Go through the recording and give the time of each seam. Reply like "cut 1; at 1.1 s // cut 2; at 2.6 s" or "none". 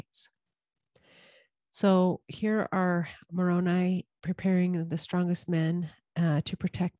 none